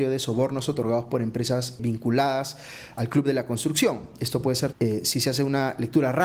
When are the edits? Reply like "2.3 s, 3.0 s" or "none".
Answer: 1.8 s, 4.7 s